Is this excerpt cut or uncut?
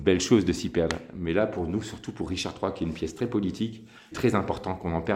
cut